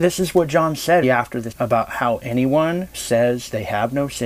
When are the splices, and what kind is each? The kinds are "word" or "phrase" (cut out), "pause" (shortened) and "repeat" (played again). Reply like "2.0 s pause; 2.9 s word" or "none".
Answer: 1.0 s word; 1.5 s word; 2.9 s word